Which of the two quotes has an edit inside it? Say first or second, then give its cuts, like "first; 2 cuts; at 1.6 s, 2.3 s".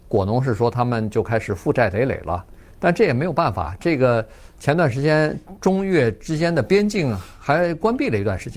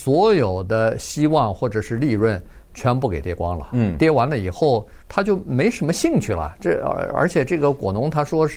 second; 1 cut; at 5.0 s